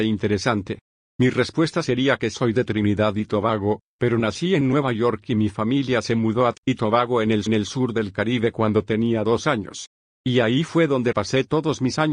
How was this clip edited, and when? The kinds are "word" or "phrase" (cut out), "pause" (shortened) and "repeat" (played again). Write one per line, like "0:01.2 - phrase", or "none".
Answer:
0:06.5 - word
0:07.5 - repeat
0:11.1 - word